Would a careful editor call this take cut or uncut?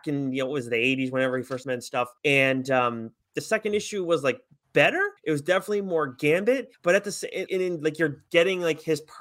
cut